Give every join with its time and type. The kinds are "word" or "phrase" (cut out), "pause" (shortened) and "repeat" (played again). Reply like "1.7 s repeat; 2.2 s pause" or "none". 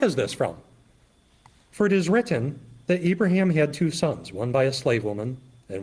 none